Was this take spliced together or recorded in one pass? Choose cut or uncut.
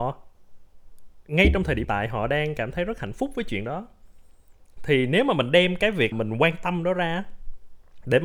cut